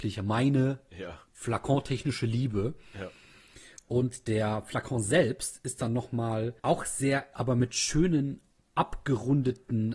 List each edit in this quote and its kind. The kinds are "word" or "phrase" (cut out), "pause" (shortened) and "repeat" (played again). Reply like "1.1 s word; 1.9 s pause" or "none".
6.6 s pause; 7.3 s phrase

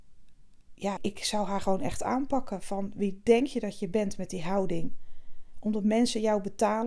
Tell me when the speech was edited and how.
1.0 s word

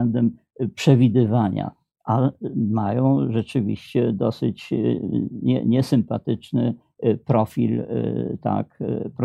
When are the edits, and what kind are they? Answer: none

